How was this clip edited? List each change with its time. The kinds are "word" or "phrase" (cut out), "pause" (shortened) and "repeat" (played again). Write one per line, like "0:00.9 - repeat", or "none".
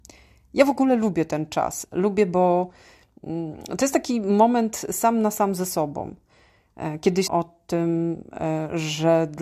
0:07.3 - word